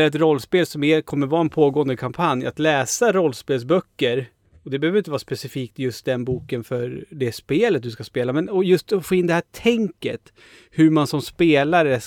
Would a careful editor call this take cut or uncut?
uncut